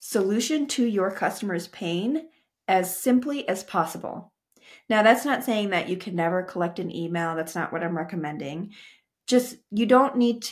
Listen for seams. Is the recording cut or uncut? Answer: uncut